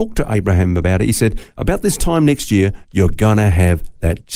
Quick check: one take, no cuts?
yes; 0 cuts

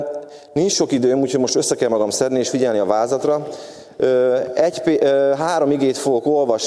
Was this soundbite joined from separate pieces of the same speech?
no; 0 cuts

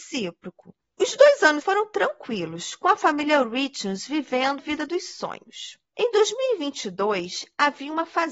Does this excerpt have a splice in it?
yes; 3 cuts; at 1.6 s, 4.6 s, 5.8 s

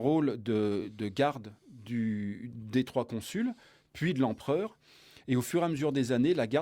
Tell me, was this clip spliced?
no; 0 cuts

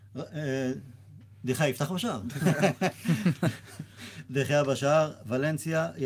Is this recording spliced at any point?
no; 0 cuts

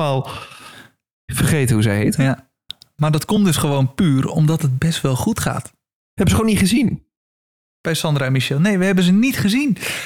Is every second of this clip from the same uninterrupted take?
yes; 0 cuts

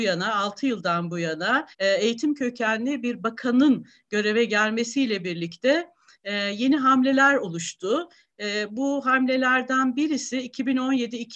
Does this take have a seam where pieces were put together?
yes; 1 cut; at 1.7 s

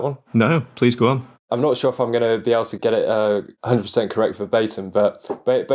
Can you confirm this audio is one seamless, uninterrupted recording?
yes; 0 cuts

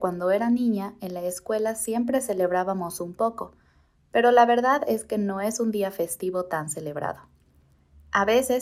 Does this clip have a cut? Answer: no; 0 cuts

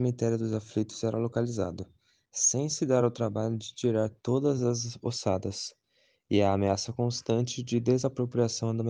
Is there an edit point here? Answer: no; 0 cuts

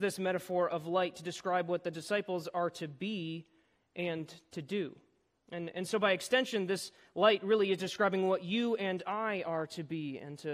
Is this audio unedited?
yes; 0 cuts

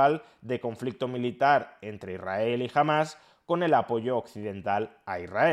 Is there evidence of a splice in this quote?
no; 0 cuts

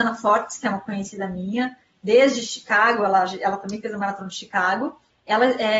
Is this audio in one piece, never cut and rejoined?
yes; 0 cuts

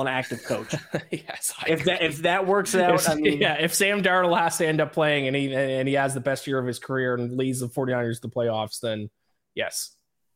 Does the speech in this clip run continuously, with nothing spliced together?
yes; 0 cuts

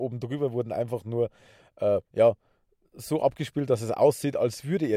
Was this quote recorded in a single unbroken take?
yes; 0 cuts

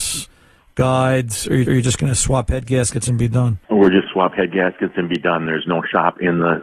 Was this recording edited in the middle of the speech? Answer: yes; 3 cuts; at 1.7 s, 3.6 s, 4.1 s

